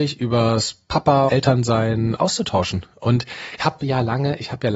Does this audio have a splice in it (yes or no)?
yes